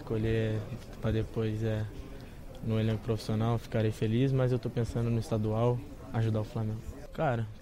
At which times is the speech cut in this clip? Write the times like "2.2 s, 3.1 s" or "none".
none